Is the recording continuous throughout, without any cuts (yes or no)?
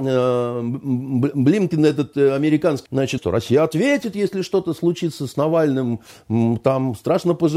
no